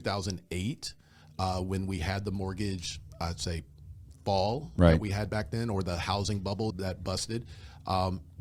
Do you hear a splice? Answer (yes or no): yes